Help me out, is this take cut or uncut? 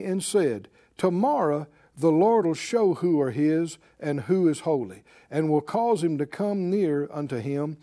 uncut